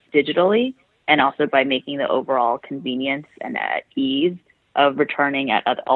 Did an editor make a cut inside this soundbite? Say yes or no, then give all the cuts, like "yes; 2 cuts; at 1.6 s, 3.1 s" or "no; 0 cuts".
no; 0 cuts